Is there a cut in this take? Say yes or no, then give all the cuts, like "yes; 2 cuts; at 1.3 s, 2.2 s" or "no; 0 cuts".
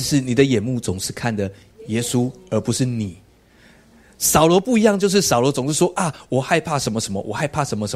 no; 0 cuts